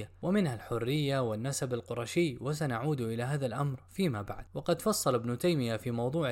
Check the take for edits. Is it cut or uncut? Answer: uncut